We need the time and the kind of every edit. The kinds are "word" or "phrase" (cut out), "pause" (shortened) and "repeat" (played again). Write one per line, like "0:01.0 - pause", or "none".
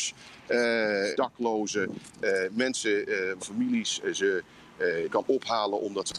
0:01.1 - phrase
0:03.4 - word
0:05.1 - word